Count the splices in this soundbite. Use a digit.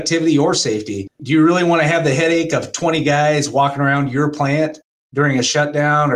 0